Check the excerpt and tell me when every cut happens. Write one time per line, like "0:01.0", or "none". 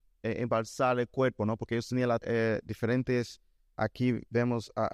0:02.2